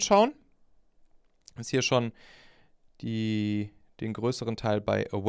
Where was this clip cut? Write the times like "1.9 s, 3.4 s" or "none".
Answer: none